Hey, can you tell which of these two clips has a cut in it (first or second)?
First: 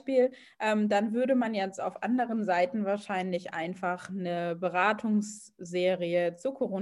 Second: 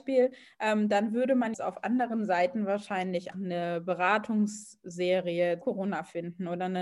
second